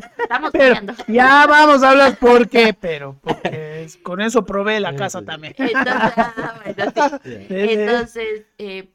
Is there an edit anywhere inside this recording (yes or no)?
no